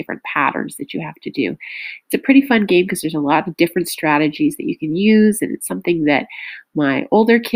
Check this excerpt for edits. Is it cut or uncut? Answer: uncut